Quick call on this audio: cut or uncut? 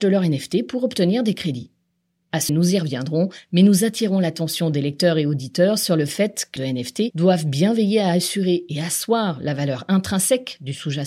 cut